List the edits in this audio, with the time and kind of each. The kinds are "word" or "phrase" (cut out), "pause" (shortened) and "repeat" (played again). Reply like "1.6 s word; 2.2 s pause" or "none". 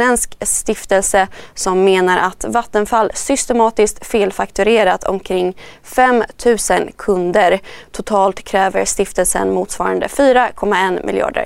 none